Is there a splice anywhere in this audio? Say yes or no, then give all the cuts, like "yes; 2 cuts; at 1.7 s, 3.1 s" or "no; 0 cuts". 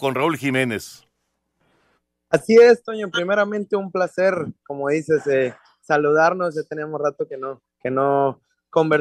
no; 0 cuts